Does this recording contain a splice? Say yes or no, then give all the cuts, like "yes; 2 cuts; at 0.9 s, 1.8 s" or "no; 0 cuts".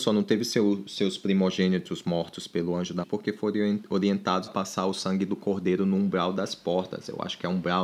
yes; 2 cuts; at 3.0 s, 4.5 s